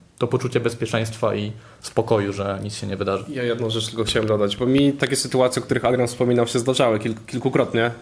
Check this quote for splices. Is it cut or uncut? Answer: uncut